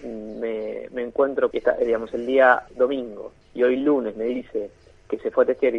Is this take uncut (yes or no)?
no